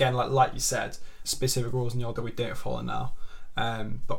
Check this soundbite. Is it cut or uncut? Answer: cut